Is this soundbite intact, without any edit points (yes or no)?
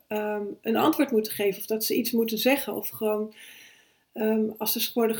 yes